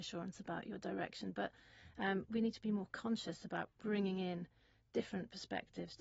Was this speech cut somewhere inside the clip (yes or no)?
no